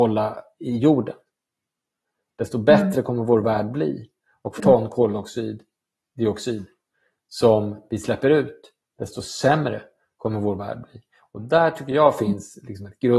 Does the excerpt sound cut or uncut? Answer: cut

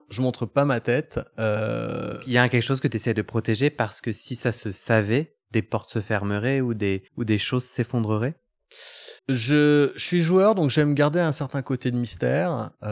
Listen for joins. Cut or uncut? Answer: cut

